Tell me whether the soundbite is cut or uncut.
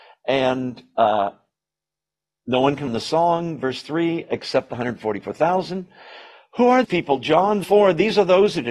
cut